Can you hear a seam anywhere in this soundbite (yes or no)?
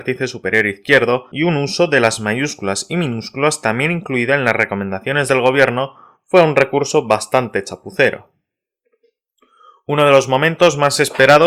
no